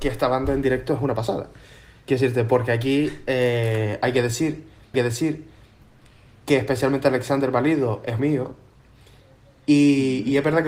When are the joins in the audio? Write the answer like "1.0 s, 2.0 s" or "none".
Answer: 4.9 s, 8.2 s